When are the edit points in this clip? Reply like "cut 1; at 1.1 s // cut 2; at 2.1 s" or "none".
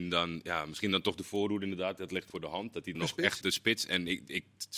cut 1; at 2.3 s // cut 2; at 2.9 s // cut 3; at 3.4 s